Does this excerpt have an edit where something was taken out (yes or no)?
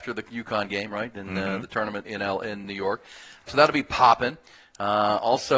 yes